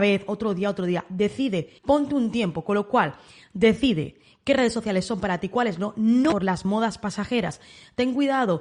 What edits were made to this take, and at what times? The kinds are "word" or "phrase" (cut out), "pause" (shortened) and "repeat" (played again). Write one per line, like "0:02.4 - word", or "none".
0:01.8 - pause